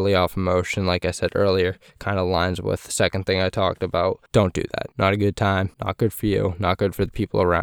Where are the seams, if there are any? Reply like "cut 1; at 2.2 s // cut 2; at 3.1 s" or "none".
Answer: cut 1; at 4.3 s // cut 2; at 4.9 s // cut 3; at 5.7 s